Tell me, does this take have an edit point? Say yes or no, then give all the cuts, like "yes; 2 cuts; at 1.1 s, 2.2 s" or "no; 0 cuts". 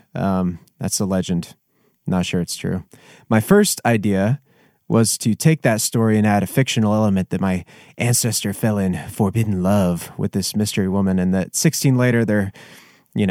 no; 0 cuts